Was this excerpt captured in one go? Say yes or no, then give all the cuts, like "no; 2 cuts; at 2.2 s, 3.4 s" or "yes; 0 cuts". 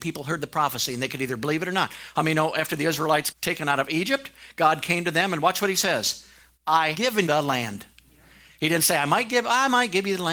no; 3 cuts; at 3.3 s, 6.9 s, 7.3 s